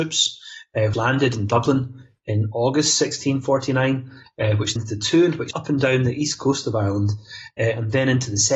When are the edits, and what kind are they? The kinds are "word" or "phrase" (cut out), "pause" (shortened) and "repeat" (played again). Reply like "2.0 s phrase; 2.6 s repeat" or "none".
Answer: 0.9 s word; 4.8 s word; 5.5 s word